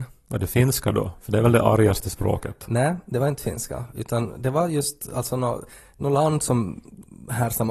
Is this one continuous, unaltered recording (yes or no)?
yes